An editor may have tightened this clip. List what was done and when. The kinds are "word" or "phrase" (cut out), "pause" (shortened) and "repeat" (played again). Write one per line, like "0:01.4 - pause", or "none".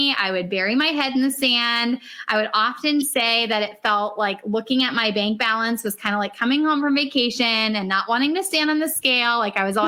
none